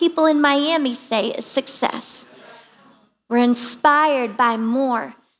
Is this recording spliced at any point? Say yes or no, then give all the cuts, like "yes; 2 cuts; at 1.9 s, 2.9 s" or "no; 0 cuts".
no; 0 cuts